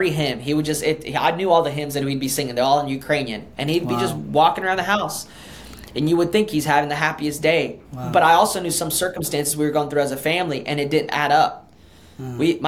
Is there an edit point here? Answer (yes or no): yes